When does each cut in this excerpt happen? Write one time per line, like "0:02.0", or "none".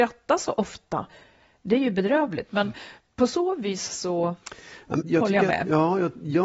0:05.0